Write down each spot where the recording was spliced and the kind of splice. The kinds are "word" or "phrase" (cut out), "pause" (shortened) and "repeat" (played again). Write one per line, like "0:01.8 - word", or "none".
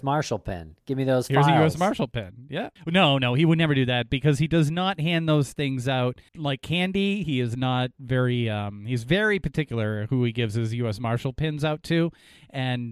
0:02.8 - pause
0:06.3 - pause